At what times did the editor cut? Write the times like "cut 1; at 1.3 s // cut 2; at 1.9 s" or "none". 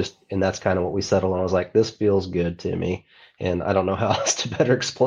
none